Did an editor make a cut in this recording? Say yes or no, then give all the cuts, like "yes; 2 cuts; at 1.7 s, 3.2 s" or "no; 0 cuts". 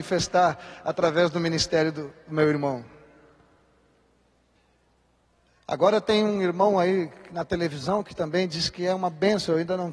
no; 0 cuts